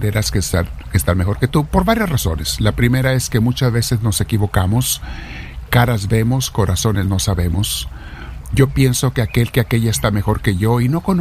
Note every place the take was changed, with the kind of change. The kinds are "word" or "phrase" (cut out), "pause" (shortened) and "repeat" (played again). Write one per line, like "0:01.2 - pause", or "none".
none